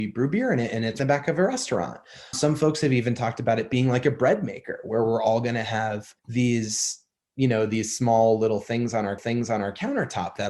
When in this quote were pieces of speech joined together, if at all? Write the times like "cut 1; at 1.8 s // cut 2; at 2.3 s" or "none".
cut 1; at 1.0 s // cut 2; at 2.3 s // cut 3; at 6.2 s // cut 4; at 9.2 s